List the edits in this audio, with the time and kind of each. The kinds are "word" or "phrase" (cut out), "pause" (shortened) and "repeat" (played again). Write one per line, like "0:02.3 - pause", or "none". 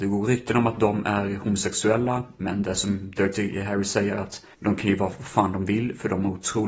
0:04.5 - pause